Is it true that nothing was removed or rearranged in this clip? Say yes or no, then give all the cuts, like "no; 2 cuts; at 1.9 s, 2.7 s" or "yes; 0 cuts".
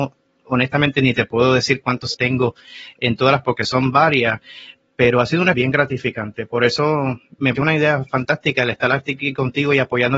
no; 4 cuts; at 2.1 s, 3.4 s, 5.5 s, 7.6 s